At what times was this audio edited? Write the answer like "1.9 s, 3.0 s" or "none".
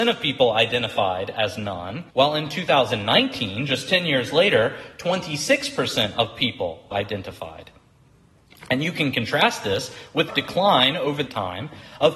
2.1 s, 6.9 s, 10.3 s, 11.3 s

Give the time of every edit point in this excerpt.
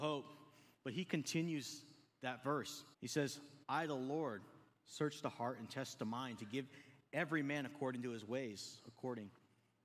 2.9 s, 3.6 s

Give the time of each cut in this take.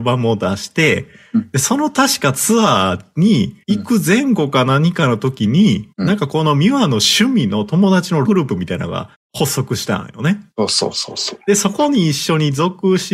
3.6 s, 5.9 s, 8.2 s, 9.1 s, 10.5 s

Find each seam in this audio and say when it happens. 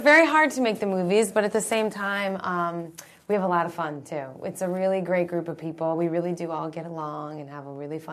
none

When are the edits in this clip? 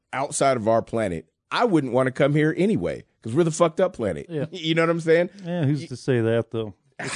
1.4 s

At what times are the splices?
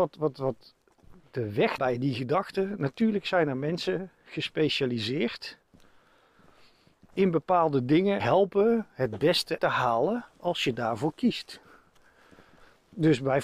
1.8 s, 8.2 s, 9.6 s, 10.3 s

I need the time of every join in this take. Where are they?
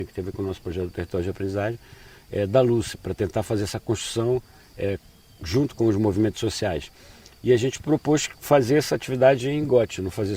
none

